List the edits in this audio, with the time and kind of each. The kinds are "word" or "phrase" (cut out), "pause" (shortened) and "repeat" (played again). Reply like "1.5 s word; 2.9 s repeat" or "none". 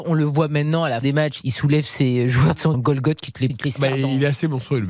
1.0 s word; 2.7 s word; 3.5 s word